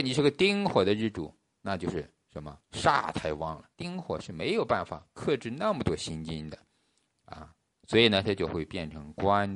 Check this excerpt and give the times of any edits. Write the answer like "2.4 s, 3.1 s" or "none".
3.7 s